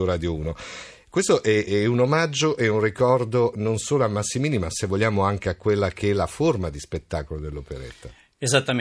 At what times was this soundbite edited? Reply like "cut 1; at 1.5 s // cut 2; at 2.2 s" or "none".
cut 1; at 1.7 s